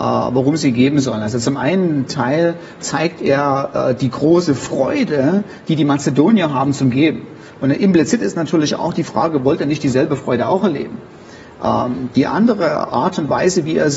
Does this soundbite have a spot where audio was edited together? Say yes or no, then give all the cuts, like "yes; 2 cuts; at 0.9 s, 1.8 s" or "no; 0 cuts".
no; 0 cuts